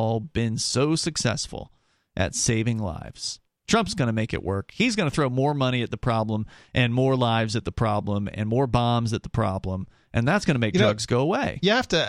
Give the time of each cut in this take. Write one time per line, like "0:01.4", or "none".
none